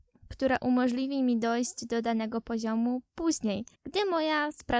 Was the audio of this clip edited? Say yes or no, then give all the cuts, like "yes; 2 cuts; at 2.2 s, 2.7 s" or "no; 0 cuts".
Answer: yes; 1 cut; at 3.7 s